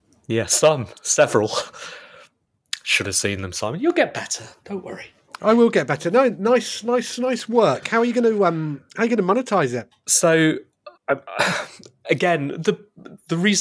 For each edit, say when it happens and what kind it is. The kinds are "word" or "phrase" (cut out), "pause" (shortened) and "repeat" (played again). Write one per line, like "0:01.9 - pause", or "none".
0:11.0 - pause